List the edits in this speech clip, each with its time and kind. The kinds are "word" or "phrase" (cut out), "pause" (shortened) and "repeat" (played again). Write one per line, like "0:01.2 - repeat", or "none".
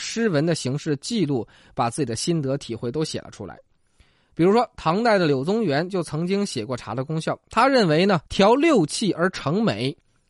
0:08.3 - pause